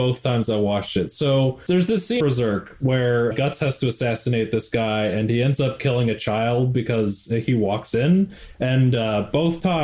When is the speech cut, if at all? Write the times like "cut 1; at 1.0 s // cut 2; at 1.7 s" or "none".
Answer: cut 1; at 1.7 s // cut 2; at 2.2 s // cut 3; at 3.3 s